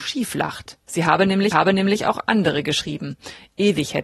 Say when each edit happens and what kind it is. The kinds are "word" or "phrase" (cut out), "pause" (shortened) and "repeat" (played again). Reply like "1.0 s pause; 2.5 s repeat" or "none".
1.5 s repeat